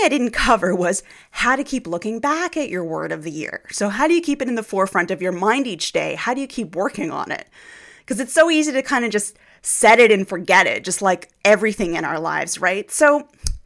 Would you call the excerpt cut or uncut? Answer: uncut